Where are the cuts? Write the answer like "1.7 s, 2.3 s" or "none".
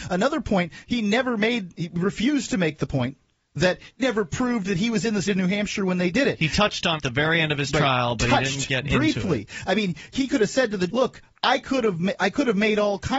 4.0 s, 5.3 s, 7.0 s, 10.1 s, 10.9 s